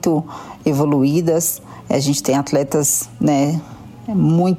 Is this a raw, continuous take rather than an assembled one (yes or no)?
yes